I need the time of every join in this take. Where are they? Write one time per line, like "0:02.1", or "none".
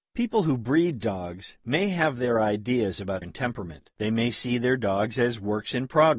0:03.2
0:03.9